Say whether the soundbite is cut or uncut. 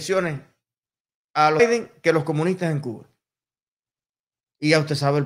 cut